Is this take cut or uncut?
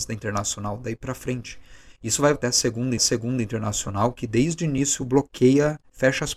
cut